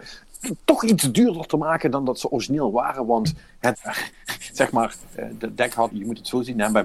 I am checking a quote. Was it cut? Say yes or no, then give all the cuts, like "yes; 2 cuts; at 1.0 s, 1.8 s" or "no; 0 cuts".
yes; 2 cuts; at 3.7 s, 5.9 s